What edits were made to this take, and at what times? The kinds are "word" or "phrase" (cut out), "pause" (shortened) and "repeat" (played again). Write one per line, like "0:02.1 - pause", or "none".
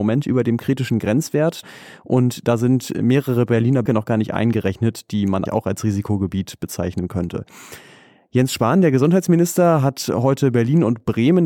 0:03.9 - word
0:05.5 - word